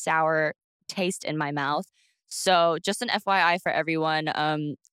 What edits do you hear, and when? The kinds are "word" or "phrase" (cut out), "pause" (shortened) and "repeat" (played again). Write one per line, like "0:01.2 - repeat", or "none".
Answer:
none